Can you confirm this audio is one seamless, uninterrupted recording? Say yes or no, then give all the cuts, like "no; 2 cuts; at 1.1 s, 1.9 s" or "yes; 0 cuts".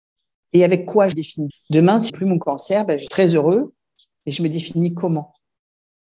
no; 4 cuts; at 1.1 s, 1.5 s, 2.1 s, 3.1 s